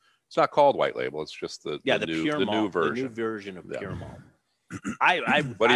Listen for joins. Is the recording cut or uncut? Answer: uncut